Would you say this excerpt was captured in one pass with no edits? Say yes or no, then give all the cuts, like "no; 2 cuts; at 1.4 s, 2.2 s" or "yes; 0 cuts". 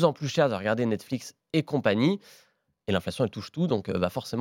yes; 0 cuts